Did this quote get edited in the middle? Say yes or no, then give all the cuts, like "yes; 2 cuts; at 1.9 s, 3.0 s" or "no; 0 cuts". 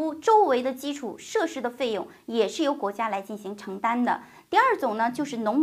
no; 0 cuts